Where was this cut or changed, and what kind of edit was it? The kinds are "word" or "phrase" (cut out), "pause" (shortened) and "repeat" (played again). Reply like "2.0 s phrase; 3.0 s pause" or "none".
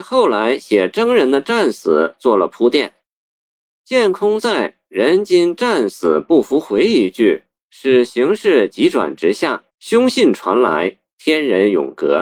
9.7 s pause